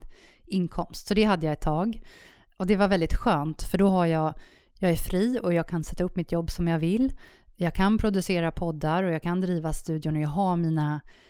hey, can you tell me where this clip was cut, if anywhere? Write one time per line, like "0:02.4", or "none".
none